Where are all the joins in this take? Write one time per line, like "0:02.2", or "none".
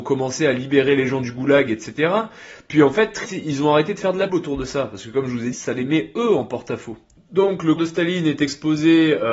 0:03.2
0:04.3
0:05.5
0:07.8